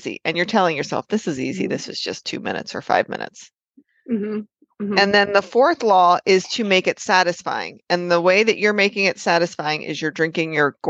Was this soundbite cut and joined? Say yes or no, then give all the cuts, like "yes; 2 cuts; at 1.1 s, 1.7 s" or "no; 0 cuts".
no; 0 cuts